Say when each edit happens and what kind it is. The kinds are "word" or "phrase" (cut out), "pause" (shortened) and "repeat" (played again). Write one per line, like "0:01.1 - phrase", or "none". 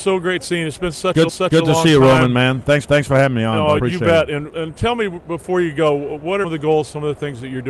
0:01.3 - repeat
0:02.8 - repeat
0:03.8 - word
0:06.4 - phrase